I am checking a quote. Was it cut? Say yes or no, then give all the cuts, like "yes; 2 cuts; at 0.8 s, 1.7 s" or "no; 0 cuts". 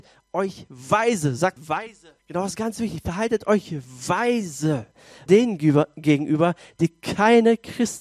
yes; 3 cuts; at 1.6 s, 2.2 s, 5.3 s